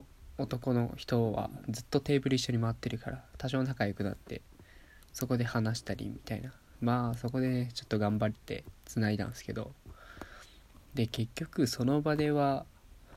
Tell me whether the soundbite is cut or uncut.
uncut